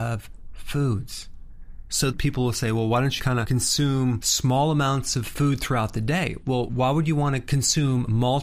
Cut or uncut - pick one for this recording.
cut